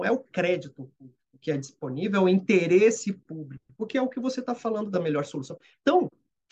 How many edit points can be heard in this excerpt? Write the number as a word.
zero